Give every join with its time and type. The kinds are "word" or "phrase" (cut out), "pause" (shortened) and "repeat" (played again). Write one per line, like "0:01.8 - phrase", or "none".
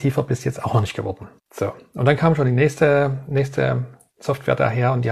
0:01.4 - pause